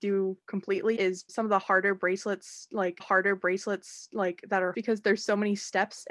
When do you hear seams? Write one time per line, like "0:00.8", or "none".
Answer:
0:01.0
0:01.3
0:03.0
0:04.7